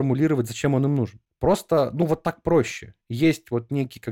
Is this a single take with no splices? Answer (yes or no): yes